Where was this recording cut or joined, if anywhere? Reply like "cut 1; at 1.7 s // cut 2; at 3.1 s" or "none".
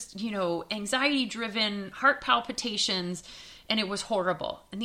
none